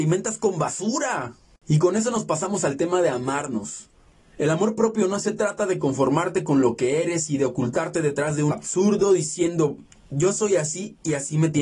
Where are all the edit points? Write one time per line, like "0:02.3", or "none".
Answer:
0:08.5